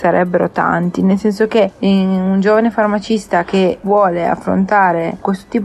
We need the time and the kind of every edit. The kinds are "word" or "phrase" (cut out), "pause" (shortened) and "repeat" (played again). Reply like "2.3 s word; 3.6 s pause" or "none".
none